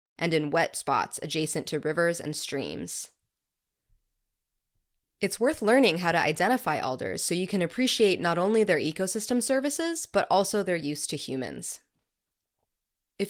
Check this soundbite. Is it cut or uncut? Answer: uncut